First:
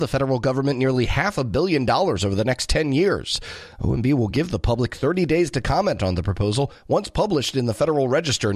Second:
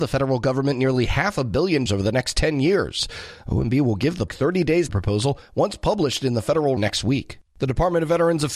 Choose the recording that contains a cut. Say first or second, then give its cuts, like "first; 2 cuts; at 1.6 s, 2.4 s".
second; 5 cuts; at 1.9 s, 4.3 s, 4.9 s, 6.8 s, 7.5 s